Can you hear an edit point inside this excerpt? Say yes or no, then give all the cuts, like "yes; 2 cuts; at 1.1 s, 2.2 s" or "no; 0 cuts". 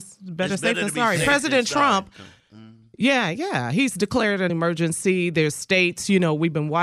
yes; 1 cut; at 4.5 s